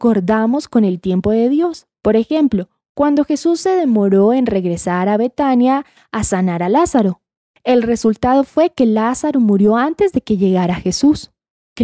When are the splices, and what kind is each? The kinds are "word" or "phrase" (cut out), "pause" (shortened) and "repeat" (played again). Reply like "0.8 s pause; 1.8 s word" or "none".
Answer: none